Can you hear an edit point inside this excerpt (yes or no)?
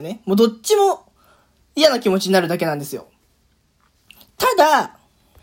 no